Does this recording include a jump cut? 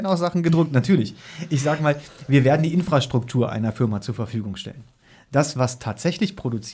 no; 0 cuts

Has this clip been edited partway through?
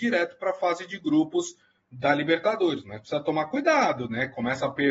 no; 0 cuts

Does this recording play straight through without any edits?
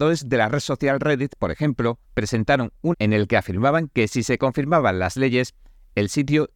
no; 2 cuts; at 2.0 s, 2.9 s

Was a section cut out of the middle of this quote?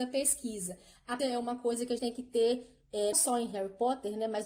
yes; 3 cuts; at 1.2 s, 2.0 s, 3.1 s

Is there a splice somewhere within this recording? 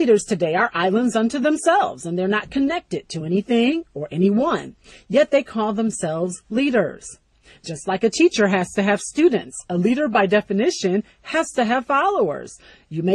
no; 0 cuts

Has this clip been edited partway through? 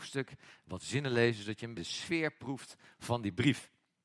yes; 1 cut; at 1.7 s

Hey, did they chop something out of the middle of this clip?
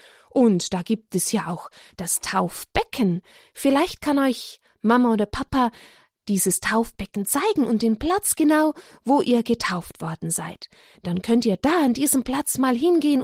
no; 0 cuts

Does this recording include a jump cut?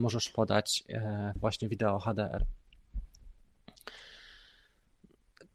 yes; 1 cut; at 1.4 s

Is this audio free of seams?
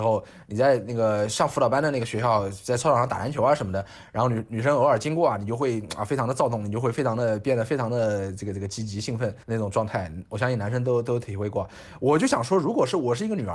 no; 1 cut; at 9.4 s

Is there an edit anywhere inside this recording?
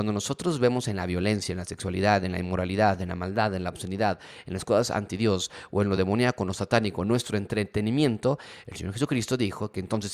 no; 0 cuts

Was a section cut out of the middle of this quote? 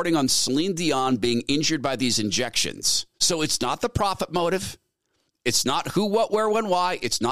yes; 1 cut; at 3.1 s

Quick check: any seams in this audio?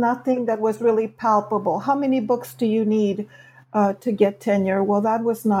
no; 0 cuts

